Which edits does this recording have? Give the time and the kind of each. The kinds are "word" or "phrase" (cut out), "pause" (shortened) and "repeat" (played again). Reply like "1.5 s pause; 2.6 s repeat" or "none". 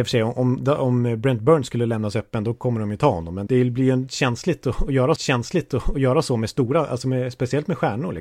3.5 s word; 5.2 s repeat